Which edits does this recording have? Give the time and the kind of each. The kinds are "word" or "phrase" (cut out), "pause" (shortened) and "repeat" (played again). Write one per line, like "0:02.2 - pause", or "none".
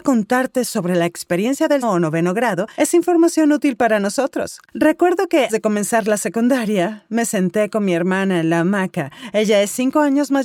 0:01.8 - word
0:05.5 - word

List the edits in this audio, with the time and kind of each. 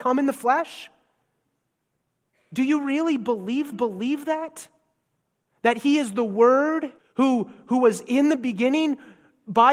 0:03.7 - repeat
0:07.0 - pause

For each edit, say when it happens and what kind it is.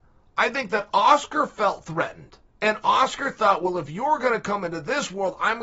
0:02.5 - pause

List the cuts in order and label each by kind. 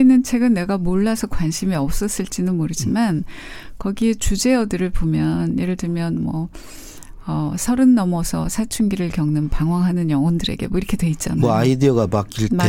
none

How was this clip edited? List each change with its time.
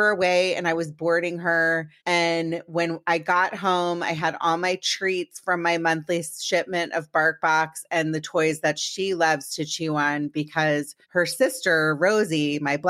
0:02.0 - pause
0:11.0 - pause

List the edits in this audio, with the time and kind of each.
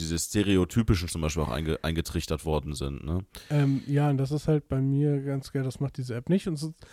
0:01.1 - word

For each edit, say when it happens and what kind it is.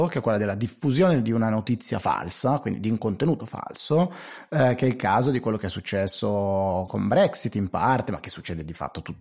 0:06.9 - word

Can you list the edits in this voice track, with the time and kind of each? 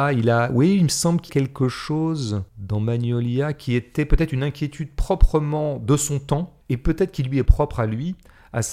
0:01.3 - word
0:02.5 - pause
0:06.6 - pause

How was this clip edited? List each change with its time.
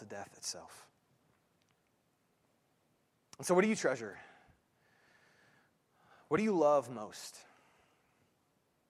none

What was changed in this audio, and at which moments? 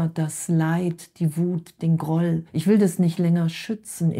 0:02.5 - pause

